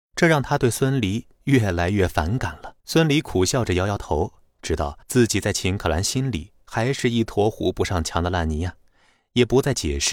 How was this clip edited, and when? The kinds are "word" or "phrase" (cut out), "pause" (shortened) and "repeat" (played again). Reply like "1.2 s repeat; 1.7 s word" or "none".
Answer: 2.8 s pause; 5.0 s pause